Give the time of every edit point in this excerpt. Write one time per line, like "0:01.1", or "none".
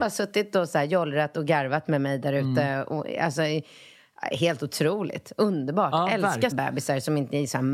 0:06.5